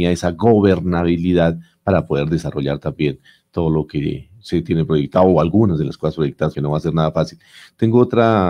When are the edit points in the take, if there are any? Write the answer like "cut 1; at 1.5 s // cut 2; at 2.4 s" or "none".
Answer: cut 1; at 6.5 s